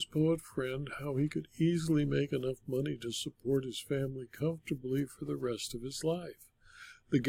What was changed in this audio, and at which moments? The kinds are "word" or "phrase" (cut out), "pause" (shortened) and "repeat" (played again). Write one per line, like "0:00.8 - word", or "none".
none